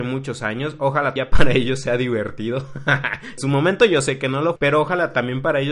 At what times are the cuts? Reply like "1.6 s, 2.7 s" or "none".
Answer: 1.2 s, 3.4 s, 4.6 s